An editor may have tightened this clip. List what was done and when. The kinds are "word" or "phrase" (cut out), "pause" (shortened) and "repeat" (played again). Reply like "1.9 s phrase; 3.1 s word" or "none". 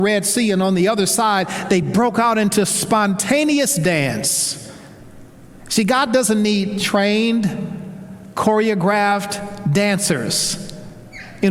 none